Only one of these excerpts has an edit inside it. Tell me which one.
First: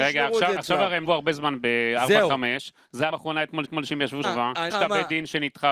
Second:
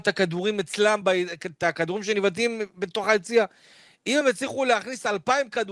first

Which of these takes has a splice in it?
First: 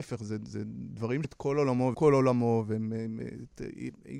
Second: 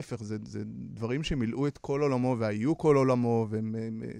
first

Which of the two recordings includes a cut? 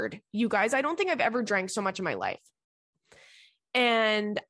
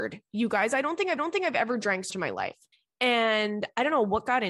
second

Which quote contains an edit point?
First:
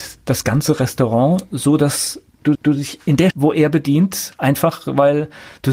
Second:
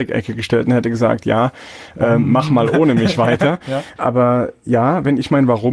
first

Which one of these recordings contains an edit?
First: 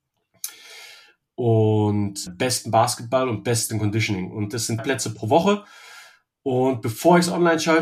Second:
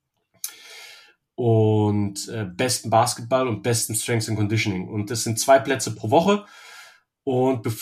first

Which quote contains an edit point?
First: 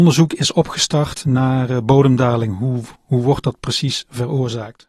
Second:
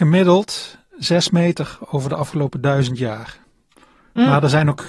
first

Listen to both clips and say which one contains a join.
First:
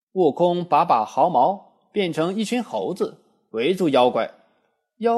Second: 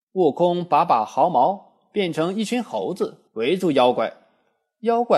second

